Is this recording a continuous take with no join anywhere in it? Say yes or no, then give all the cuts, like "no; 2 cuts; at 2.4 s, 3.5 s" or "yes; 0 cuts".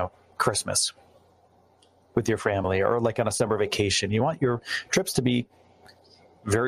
yes; 0 cuts